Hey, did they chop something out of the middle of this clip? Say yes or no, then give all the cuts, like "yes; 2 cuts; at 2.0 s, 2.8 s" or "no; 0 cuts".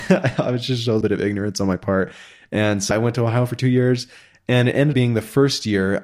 yes; 3 cuts; at 1.0 s, 2.9 s, 4.9 s